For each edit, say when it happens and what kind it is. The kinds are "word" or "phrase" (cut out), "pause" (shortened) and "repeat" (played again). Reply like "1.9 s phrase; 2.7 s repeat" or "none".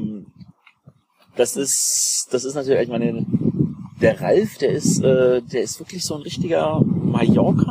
none